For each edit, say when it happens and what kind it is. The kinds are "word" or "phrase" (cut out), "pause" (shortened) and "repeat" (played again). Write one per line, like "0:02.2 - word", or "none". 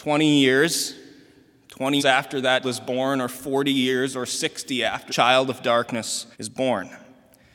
0:02.0 - word
0:02.6 - word
0:05.1 - word
0:06.3 - pause